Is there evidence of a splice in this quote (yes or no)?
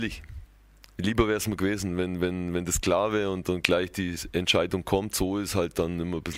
no